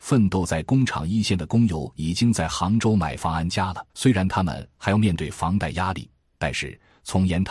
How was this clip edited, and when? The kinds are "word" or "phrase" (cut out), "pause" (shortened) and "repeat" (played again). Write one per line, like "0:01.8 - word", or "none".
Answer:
0:03.9 - pause